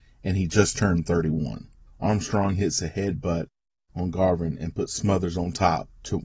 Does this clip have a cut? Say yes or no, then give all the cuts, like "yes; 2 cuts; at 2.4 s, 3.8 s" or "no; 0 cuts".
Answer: no; 0 cuts